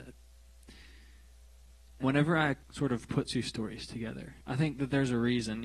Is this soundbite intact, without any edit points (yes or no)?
no